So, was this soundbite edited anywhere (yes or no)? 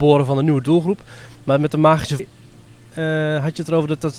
yes